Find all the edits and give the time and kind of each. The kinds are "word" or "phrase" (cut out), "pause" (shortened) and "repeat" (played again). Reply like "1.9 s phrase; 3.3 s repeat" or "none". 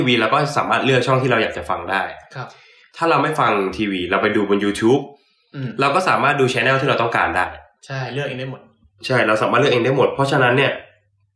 none

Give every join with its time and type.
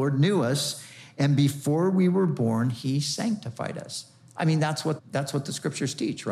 5.0 s word

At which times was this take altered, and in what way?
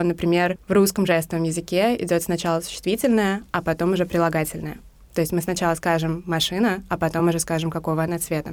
none

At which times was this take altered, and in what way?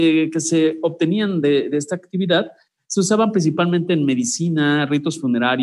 none

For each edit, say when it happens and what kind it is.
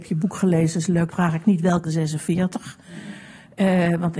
1.1 s word; 1.8 s word

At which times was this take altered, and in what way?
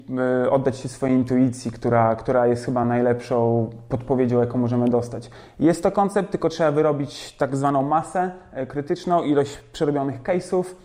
none

